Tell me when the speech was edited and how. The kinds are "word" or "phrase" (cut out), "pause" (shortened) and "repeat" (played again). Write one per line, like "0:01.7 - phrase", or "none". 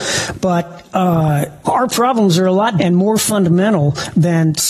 0:01.6 - word
0:02.8 - word

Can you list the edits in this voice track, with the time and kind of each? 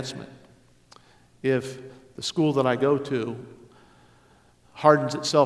none

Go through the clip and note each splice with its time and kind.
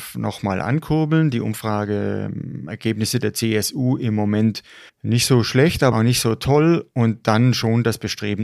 0:04.9 - pause
0:05.9 - word

